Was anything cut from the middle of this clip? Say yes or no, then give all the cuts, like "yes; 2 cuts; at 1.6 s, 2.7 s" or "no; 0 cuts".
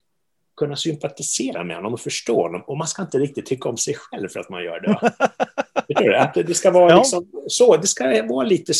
no; 0 cuts